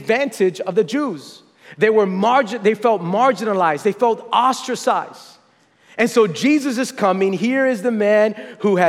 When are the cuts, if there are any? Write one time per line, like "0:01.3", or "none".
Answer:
none